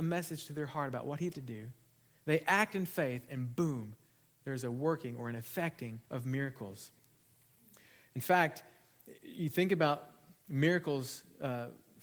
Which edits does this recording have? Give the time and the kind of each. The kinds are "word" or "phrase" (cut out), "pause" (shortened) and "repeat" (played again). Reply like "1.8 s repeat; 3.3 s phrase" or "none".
1.3 s word; 6.0 s pause; 10.3 s pause